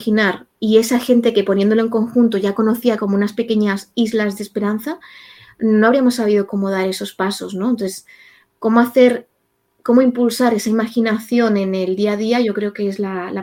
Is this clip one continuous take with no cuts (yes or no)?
no